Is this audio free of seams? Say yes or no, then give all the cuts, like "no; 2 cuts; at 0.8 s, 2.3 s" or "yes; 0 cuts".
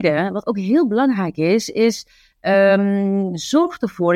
yes; 0 cuts